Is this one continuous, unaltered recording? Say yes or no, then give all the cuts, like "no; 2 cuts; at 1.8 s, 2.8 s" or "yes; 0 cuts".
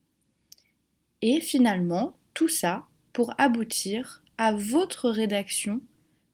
yes; 0 cuts